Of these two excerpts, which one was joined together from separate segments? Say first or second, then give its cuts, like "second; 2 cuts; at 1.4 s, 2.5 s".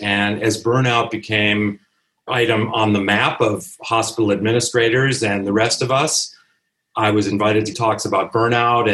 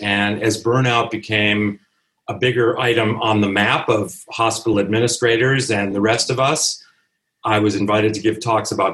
first; 2 cuts; at 2.3 s, 7.7 s